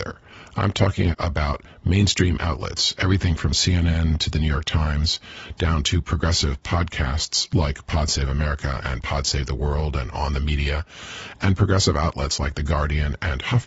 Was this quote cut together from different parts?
no; 0 cuts

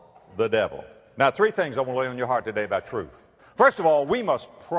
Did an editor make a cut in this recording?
yes; 1 cut; at 3.4 s

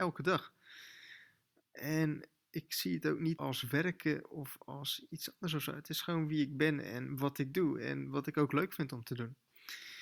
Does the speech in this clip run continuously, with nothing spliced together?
no; 2 cuts; at 3.4 s, 5.1 s

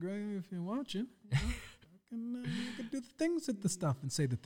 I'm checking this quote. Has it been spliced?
no; 0 cuts

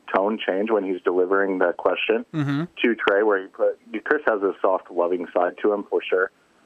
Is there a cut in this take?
yes; 1 cut; at 4.6 s

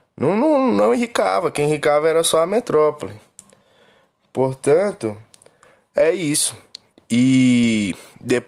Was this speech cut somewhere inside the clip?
no; 0 cuts

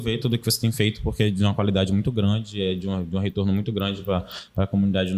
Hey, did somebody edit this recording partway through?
no; 0 cuts

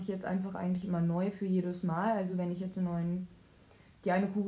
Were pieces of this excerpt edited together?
no; 0 cuts

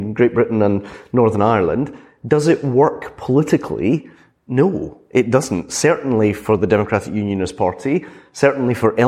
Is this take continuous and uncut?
yes; 0 cuts

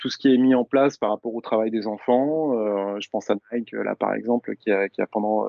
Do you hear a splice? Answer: no; 0 cuts

